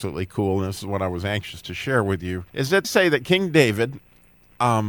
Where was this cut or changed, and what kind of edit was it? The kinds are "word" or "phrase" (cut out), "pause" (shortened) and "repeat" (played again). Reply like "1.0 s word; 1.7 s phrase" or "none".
2.5 s pause; 2.8 s word